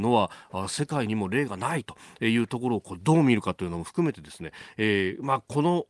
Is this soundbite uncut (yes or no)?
yes